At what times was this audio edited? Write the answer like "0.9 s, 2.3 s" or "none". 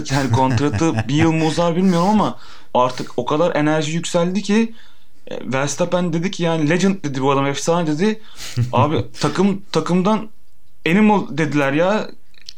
none